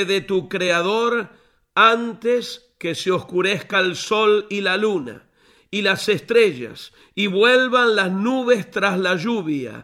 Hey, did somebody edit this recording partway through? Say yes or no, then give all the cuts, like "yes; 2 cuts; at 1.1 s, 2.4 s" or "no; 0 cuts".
no; 0 cuts